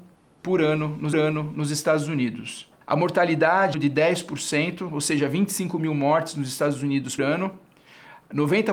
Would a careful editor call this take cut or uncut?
cut